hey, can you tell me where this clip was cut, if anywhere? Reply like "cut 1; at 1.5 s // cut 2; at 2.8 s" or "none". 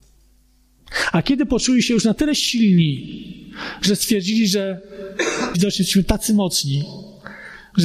cut 1; at 5.5 s